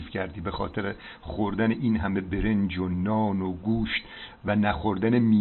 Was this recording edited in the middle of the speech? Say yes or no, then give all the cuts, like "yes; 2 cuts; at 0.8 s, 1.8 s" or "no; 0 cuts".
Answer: no; 0 cuts